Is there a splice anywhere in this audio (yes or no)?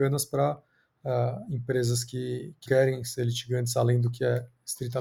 yes